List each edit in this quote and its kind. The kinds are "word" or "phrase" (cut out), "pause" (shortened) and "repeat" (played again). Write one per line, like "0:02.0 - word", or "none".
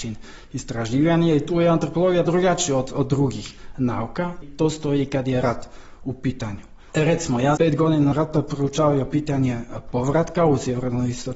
0:02.3 - word
0:04.4 - word
0:07.6 - word
0:08.1 - word

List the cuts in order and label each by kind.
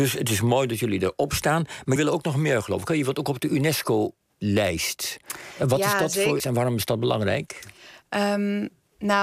0:02.0 - word
0:06.4 - word

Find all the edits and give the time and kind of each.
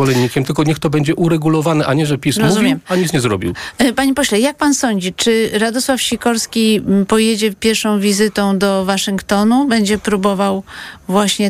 none

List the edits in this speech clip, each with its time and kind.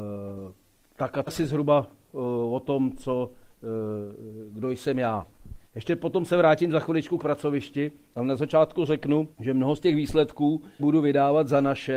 0:01.3 - word
0:05.6 - pause
0:07.2 - word
0:09.3 - pause
0:10.8 - word

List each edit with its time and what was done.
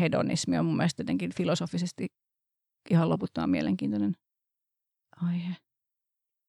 none

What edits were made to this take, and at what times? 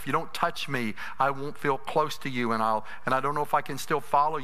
none

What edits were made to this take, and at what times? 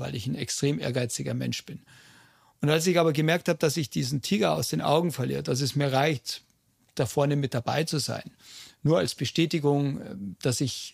none

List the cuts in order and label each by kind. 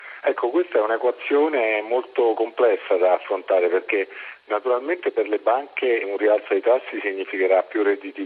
0:06.0 - word

